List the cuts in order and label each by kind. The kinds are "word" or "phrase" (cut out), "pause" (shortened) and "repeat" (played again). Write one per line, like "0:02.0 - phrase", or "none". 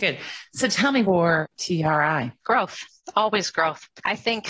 0:01.0 - phrase
0:02.4 - pause